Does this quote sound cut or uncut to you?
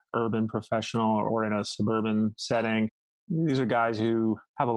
uncut